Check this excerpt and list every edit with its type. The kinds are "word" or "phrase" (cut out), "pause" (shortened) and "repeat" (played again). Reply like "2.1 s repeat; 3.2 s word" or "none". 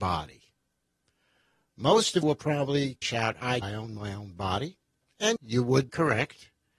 2.2 s word; 3.0 s word; 3.6 s word; 5.4 s word; 5.9 s word